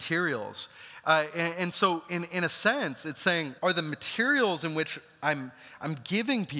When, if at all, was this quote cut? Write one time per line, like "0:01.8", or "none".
0:03.6